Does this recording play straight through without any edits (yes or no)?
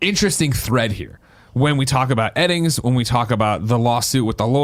yes